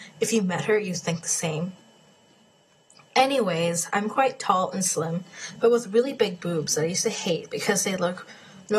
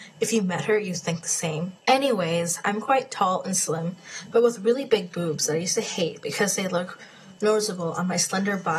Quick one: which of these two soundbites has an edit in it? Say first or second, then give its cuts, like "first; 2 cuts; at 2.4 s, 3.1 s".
second; 1 cut; at 1.8 s